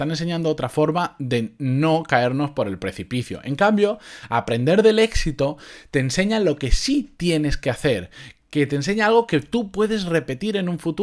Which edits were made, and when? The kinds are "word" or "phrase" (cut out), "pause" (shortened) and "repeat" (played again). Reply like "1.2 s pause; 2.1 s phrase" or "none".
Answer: none